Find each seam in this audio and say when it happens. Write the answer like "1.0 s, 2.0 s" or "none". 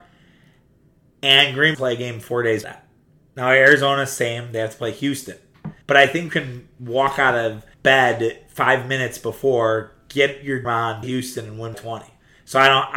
1.7 s, 2.6 s, 5.8 s, 6.3 s, 7.7 s, 10.6 s, 11.0 s, 11.7 s